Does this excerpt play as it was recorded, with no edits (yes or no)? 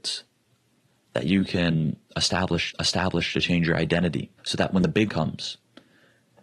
no